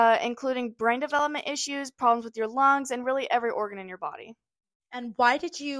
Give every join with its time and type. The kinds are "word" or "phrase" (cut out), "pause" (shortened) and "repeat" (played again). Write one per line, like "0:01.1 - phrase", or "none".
none